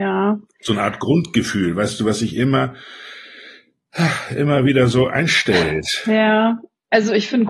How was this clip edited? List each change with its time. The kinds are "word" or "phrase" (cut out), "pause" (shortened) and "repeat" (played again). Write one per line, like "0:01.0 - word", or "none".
none